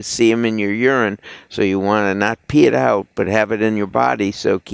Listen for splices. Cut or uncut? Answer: uncut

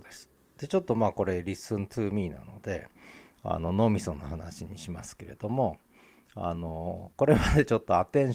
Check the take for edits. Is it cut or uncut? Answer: uncut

